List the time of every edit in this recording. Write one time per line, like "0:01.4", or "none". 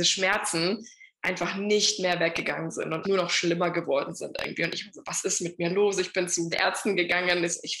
0:03.0
0:06.5